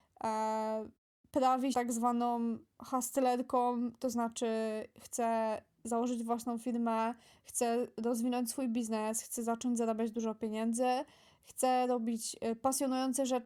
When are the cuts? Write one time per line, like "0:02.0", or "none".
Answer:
0:01.7